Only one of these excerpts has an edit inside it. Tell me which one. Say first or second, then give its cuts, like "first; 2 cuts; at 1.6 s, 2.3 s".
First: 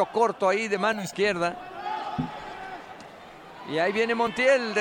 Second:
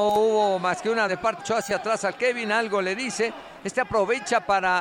second; 2 cuts; at 1.1 s, 1.4 s